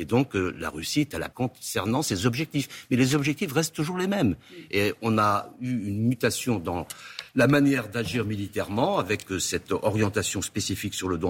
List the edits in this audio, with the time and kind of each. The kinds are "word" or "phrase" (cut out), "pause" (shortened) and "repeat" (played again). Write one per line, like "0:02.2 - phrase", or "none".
0:01.3 - word